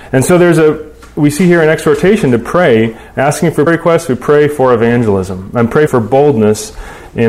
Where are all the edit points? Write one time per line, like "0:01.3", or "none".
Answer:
0:03.7
0:05.9

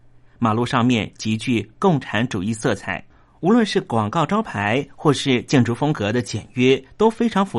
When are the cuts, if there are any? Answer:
none

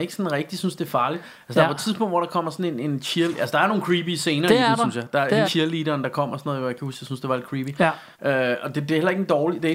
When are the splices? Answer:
0:05.4
0:08.1

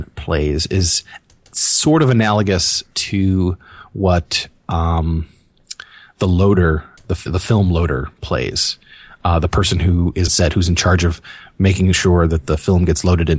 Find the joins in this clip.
0:07.3
0:10.3

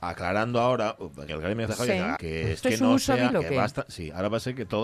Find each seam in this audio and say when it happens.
0:01.3
0:01.7
0:02.2
0:02.6
0:03.3

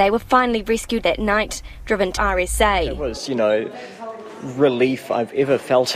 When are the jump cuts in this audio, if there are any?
0:01.0
0:02.2
0:03.3

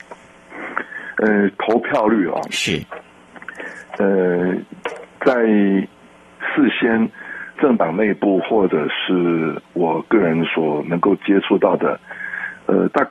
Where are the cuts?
0:07.6

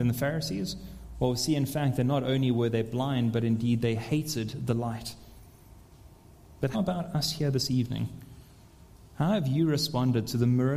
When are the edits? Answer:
0:06.7

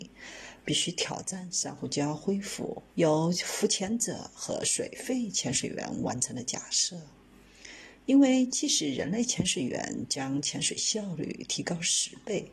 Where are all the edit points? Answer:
0:02.9

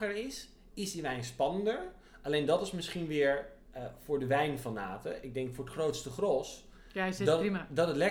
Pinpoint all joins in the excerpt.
none

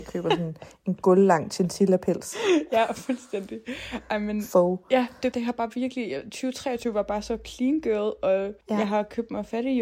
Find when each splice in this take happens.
0:05.3
0:08.6

